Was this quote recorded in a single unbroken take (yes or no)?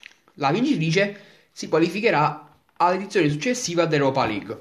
yes